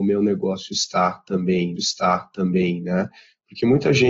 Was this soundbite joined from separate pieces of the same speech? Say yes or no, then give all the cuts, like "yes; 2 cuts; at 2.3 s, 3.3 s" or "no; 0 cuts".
yes; 1 cut; at 1.8 s